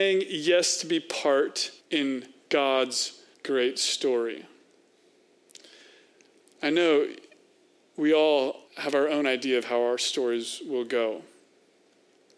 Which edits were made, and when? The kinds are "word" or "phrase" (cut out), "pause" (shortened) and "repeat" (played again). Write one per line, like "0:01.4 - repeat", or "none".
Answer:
0:01.8 - pause
0:03.3 - pause
0:08.7 - pause